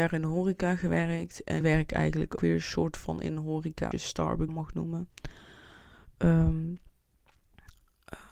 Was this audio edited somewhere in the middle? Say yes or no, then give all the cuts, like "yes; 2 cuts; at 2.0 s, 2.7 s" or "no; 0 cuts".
yes; 4 cuts; at 1.6 s, 2.4 s, 3.9 s, 4.5 s